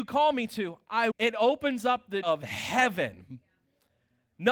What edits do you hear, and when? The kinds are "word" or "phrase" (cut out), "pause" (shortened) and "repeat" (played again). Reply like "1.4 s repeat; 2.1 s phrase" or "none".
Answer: 1.1 s word; 2.2 s word